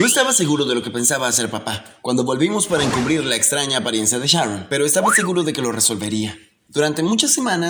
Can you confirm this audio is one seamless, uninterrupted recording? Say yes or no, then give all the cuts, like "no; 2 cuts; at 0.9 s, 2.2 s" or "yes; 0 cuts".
yes; 0 cuts